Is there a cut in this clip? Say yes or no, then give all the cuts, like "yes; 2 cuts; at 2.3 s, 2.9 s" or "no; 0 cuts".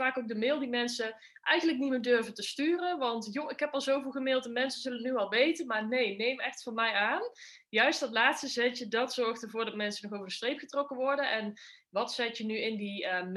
no; 0 cuts